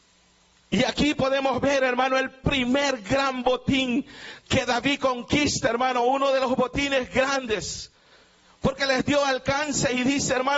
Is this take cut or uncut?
uncut